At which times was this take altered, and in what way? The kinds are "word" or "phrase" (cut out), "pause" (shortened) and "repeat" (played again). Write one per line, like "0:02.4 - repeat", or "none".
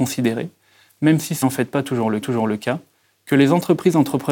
0:01.4 - word
0:02.2 - repeat